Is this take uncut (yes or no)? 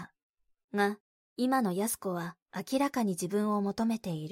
no